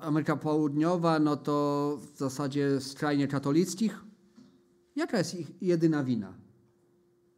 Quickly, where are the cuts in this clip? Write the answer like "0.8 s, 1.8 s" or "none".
none